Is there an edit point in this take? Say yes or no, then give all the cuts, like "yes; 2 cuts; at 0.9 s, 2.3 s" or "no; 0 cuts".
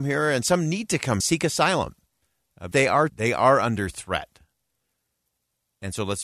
yes; 3 cuts; at 1.2 s, 2.7 s, 3.1 s